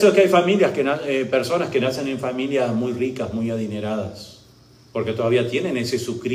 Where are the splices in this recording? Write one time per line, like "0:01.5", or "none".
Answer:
none